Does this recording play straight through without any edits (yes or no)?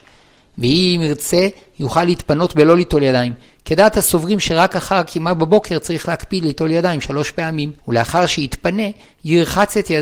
no